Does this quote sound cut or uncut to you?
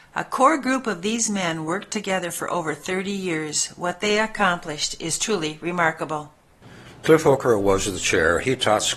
uncut